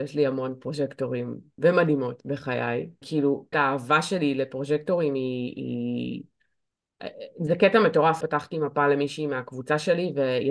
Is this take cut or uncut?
cut